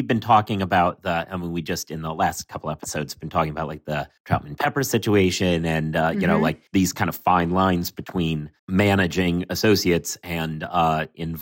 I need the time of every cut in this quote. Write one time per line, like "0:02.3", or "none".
0:04.2
0:06.7
0:08.6